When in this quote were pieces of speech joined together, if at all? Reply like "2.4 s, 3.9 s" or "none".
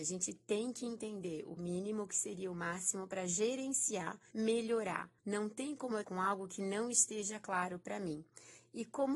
1.6 s, 4.3 s, 5.2 s, 6.0 s